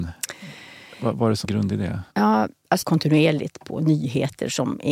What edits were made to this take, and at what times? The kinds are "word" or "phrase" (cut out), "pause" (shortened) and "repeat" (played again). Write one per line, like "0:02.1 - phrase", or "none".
0:01.4 - word
0:02.1 - pause
0:02.8 - phrase

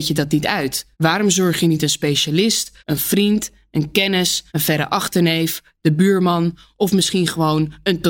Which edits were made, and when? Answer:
0:00.9 - pause
0:02.8 - pause
0:04.5 - pause

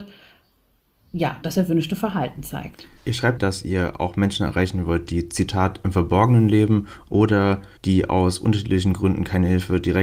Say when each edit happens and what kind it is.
0:01.4 - word
0:03.0 - pause
0:03.4 - phrase
0:07.8 - pause

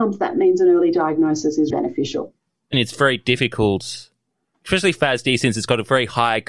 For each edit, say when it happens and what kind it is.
0:01.7 - word
0:02.7 - phrase

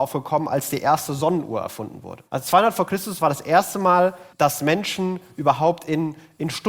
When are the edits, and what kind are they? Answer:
0:02.3 - pause
0:04.3 - pause

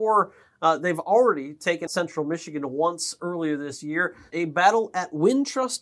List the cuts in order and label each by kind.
0:01.9 - word
0:04.3 - word

